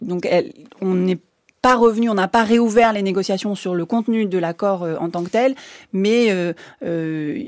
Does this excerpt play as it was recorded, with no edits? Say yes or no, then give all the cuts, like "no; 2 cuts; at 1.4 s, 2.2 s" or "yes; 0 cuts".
yes; 0 cuts